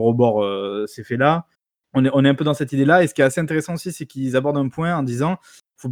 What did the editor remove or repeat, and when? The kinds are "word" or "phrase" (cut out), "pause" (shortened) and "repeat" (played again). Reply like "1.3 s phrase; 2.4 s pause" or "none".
1.5 s pause